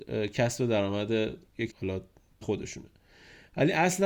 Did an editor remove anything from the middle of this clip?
yes; 2 cuts; at 1.7 s, 2.4 s

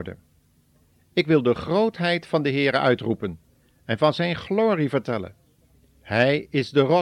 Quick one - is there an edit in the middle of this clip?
no; 0 cuts

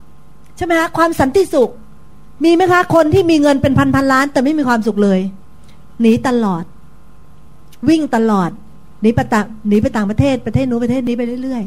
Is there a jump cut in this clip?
no; 0 cuts

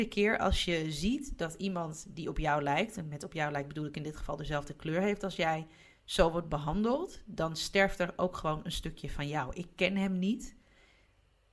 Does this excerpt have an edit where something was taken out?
no; 0 cuts

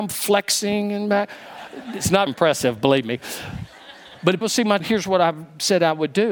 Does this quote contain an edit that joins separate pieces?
yes; 3 cuts; at 2.3 s, 4.4 s, 4.8 s

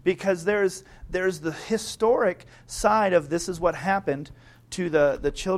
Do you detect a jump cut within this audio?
no; 0 cuts

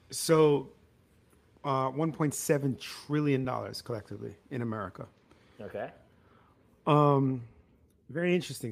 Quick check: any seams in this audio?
no; 0 cuts

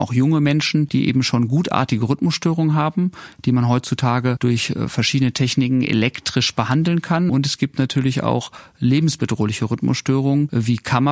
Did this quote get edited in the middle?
no; 0 cuts

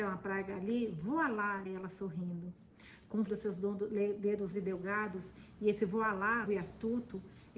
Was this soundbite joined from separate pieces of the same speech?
yes; 4 cuts; at 1.7 s, 3.3 s, 4.5 s, 6.5 s

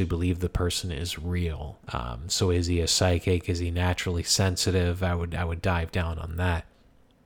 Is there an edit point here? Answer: yes; 1 cut; at 1.8 s

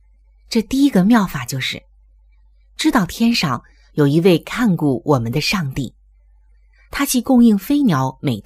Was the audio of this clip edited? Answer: no; 0 cuts

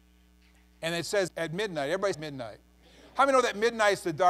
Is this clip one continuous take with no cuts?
no; 2 cuts; at 1.3 s, 2.1 s

